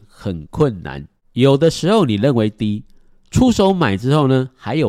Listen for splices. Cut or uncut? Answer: uncut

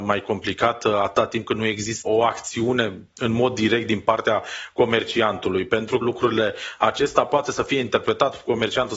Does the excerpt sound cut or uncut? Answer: cut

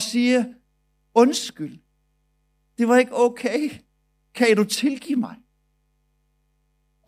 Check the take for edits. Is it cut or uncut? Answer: uncut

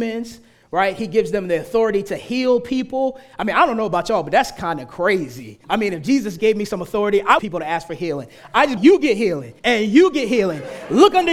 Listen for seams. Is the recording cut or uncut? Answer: cut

